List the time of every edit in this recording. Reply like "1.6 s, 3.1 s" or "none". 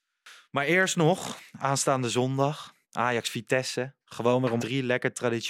1.5 s, 2.8 s, 4.0 s, 4.6 s